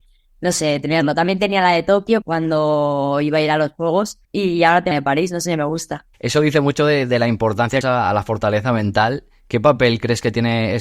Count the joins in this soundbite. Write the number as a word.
five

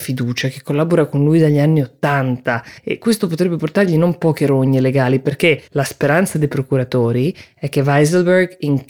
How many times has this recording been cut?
two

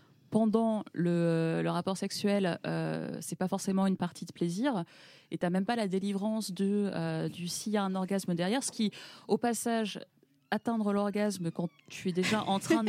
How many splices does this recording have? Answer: zero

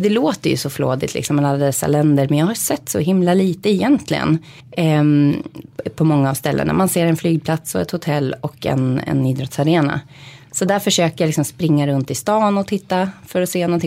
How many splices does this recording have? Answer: one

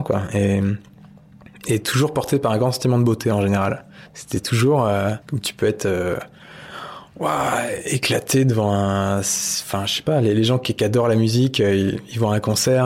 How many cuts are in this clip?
two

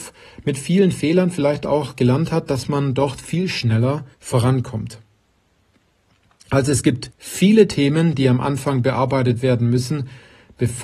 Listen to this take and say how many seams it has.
two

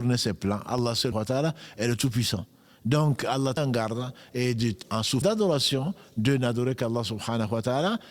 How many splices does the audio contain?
four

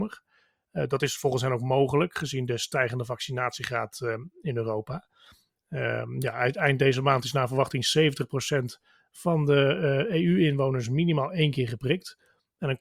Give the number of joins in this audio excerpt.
zero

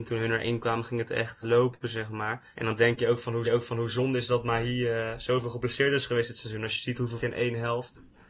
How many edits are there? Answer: four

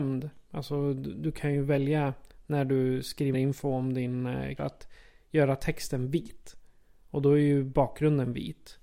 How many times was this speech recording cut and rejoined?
two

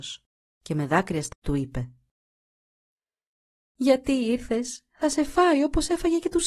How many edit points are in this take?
one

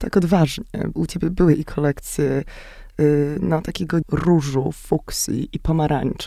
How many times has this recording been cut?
two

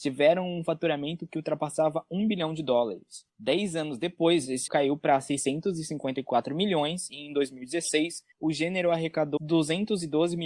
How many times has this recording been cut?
four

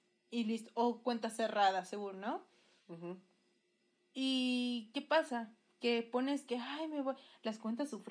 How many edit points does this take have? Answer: zero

